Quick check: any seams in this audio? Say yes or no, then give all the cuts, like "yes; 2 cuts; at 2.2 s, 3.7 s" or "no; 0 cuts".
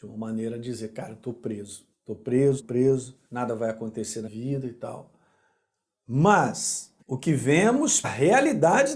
yes; 6 cuts; at 1.9 s, 2.6 s, 3.3 s, 4.3 s, 7.0 s, 8.0 s